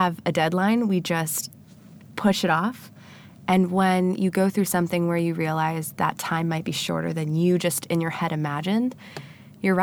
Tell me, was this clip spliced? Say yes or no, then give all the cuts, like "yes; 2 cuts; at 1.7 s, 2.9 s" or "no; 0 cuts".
no; 0 cuts